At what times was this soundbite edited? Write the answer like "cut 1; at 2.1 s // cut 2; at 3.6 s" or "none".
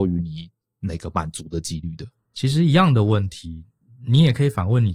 none